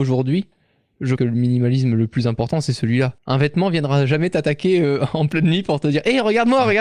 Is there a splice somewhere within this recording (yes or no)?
yes